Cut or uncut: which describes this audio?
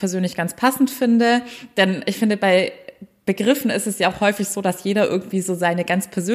uncut